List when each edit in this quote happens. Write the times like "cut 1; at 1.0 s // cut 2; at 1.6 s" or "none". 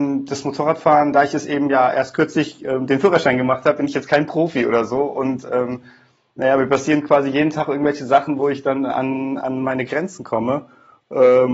none